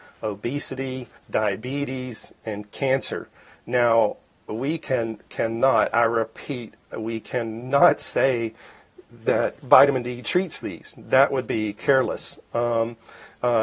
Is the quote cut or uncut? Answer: cut